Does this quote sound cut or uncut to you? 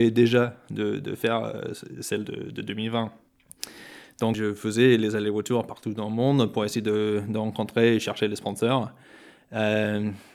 uncut